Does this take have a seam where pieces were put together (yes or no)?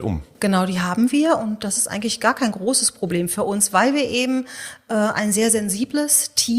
no